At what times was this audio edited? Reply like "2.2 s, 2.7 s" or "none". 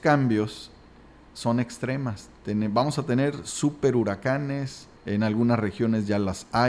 5.0 s